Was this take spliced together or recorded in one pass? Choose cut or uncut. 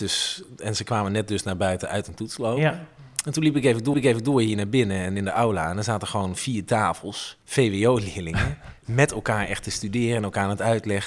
cut